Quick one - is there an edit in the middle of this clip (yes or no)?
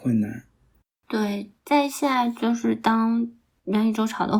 no